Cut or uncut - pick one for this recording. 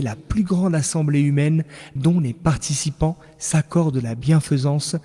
cut